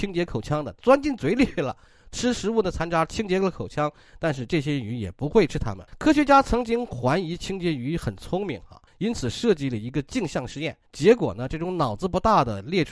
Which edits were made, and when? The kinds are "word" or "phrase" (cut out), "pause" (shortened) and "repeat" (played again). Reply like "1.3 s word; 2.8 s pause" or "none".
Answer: 5.9 s pause; 8.9 s pause; 10.9 s pause